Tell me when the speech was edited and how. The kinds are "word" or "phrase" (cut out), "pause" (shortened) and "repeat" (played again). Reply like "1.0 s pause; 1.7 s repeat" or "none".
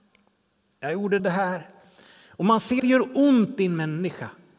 1.2 s phrase; 2.8 s word